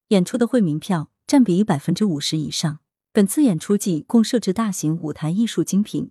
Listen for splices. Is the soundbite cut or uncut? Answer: uncut